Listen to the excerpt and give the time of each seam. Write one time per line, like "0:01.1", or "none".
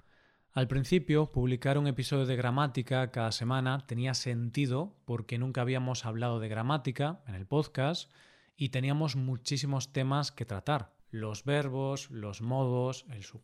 none